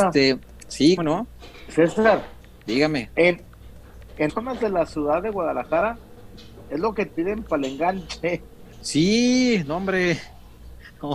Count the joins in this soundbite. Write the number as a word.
three